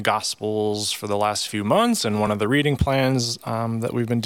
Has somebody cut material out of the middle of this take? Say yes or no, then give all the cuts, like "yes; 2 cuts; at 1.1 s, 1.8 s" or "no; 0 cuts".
no; 0 cuts